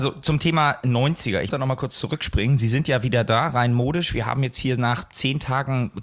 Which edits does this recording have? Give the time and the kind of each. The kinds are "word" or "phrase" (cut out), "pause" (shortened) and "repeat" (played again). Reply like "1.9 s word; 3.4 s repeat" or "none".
1.5 s word